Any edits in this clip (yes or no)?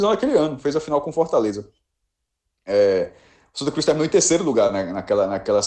no